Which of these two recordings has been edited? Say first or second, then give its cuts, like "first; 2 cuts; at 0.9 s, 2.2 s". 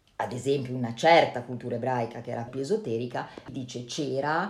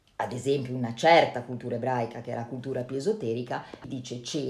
first; 1 cut; at 2.5 s